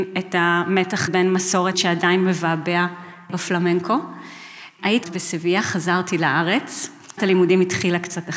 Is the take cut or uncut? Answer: cut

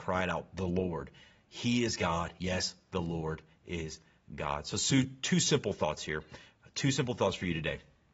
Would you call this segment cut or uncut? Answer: uncut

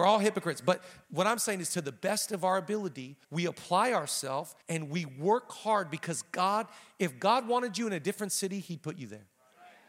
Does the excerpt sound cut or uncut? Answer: cut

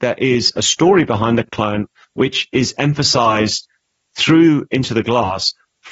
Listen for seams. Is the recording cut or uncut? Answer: uncut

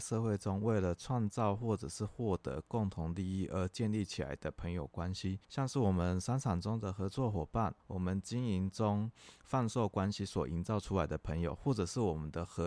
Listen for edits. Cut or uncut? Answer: cut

